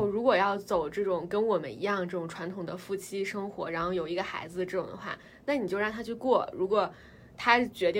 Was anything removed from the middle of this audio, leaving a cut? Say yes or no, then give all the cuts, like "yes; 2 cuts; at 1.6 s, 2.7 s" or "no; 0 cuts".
no; 0 cuts